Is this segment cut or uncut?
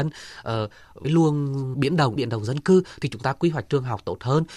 cut